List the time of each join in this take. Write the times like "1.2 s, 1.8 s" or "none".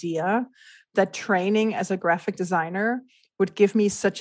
none